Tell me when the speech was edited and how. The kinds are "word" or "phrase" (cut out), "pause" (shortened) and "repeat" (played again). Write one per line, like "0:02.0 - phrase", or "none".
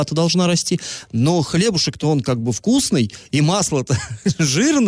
none